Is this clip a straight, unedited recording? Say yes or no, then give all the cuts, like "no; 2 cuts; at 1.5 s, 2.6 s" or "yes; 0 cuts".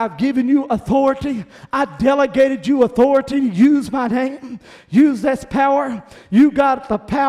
yes; 0 cuts